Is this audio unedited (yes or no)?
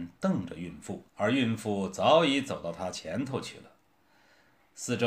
no